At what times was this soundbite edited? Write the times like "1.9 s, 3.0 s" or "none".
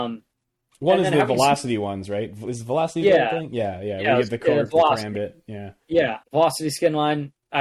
5.8 s, 6.2 s